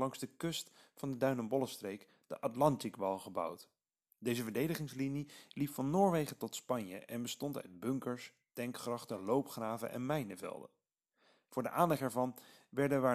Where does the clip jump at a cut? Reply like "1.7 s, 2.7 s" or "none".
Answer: none